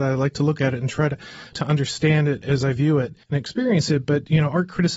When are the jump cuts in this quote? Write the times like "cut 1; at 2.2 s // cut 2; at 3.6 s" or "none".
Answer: cut 1; at 3.2 s